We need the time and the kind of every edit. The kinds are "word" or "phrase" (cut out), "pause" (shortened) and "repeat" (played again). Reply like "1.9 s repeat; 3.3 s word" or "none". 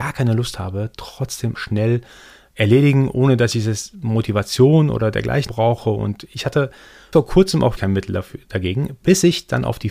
1.5 s word; 5.5 s word; 7.1 s word; 7.8 s word